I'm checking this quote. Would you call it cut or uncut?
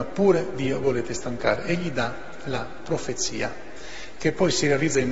uncut